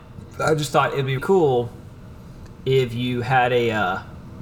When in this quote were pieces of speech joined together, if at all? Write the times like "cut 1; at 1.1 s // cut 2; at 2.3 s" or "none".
cut 1; at 1.2 s